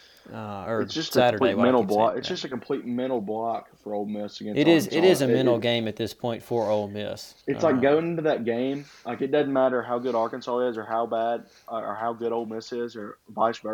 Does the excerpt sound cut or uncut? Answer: cut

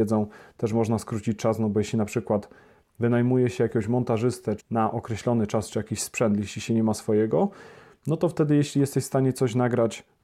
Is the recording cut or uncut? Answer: cut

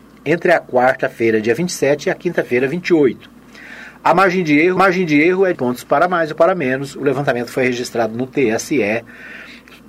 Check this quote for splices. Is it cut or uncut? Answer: cut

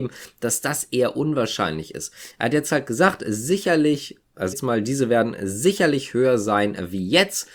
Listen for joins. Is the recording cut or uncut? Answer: cut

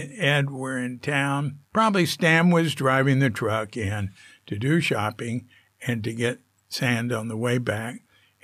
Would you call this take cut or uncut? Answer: cut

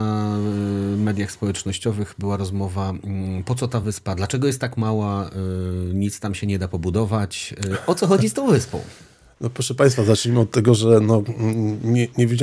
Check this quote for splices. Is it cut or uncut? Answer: uncut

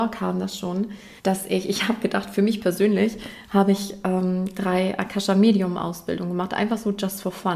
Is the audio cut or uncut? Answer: cut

